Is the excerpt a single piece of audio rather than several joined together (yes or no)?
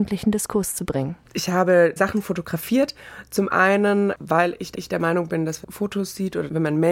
no